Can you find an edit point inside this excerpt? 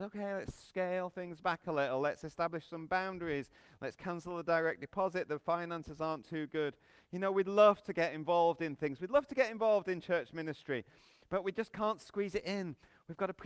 no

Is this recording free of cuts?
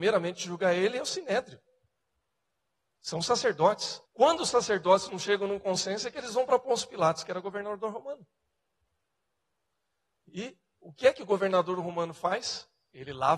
no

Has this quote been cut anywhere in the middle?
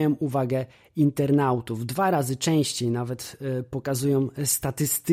no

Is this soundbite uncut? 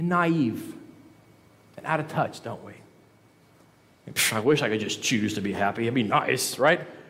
yes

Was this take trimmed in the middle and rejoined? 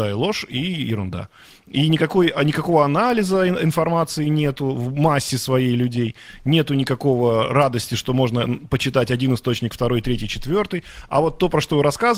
no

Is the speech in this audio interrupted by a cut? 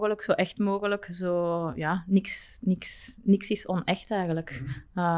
no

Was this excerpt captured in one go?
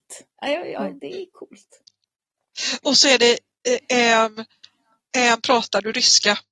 yes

